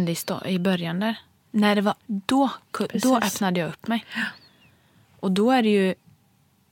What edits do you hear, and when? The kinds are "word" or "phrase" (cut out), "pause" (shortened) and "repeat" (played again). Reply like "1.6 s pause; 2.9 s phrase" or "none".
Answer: 2.0 s word

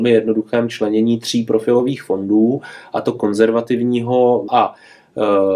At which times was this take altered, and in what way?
4.5 s word

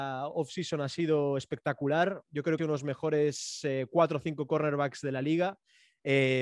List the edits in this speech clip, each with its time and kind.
2.6 s phrase

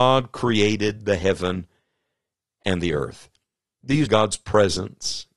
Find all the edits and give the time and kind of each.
4.1 s word

